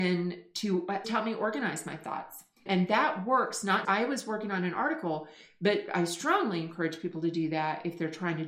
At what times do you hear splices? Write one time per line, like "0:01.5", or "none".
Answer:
0:01.0
0:02.7
0:03.8